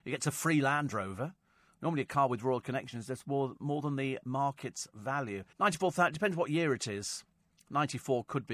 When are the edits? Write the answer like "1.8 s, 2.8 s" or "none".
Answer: 5.5 s